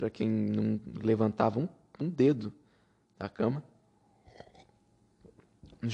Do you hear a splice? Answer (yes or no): no